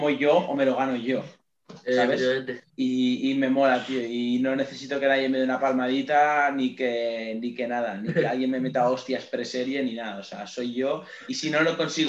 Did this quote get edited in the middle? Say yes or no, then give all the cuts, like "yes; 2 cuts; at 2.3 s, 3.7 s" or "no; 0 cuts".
yes; 1 cut; at 2.7 s